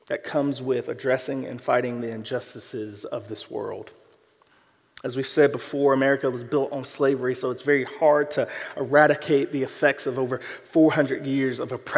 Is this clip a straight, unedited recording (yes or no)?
yes